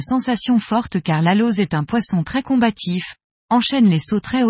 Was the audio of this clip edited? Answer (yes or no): no